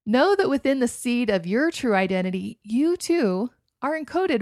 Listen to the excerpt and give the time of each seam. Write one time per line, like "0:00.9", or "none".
none